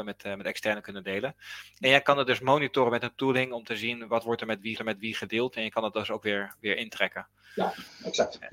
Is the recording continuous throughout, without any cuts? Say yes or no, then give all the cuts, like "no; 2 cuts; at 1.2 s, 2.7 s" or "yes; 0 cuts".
no; 1 cut; at 4.7 s